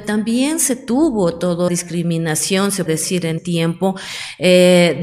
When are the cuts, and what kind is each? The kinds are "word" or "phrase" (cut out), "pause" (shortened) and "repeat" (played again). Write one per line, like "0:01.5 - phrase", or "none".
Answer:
0:01.7 - word
0:02.9 - word
0:03.4 - word